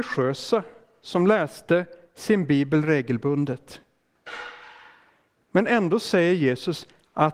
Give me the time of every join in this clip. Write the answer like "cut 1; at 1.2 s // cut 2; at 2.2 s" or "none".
none